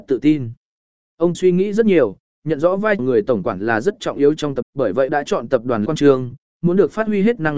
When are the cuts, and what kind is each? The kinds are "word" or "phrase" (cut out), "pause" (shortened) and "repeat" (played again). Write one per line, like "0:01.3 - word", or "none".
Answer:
0:01.3 - word
0:03.0 - word
0:04.6 - word
0:05.1 - word
0:05.9 - word